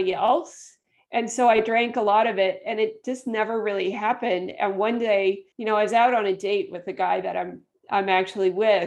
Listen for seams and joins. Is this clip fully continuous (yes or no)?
no